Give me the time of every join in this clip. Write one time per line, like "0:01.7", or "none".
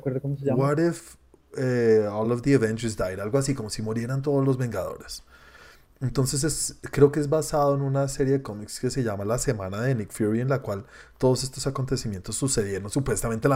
none